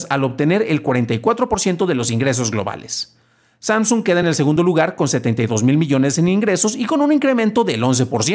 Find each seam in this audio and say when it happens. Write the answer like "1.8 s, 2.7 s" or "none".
none